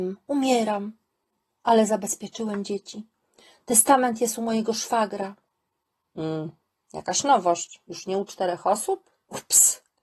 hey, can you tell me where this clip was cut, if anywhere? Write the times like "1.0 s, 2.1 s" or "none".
none